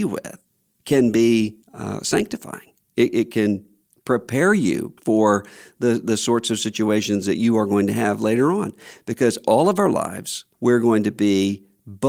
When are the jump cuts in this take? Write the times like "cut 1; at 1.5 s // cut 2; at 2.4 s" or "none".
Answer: cut 1; at 1.6 s // cut 2; at 3.9 s // cut 3; at 5.0 s // cut 4; at 10.5 s